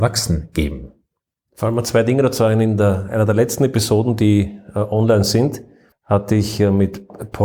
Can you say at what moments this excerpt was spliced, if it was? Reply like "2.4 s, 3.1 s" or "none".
none